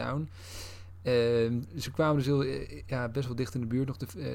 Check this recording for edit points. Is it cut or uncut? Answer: uncut